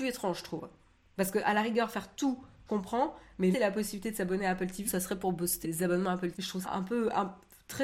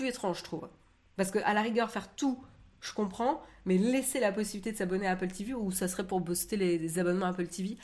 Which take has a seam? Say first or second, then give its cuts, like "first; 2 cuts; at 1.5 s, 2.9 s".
first; 6 cuts; at 2.7 s, 3.5 s, 4.9 s, 5.6 s, 6.3 s, 6.6 s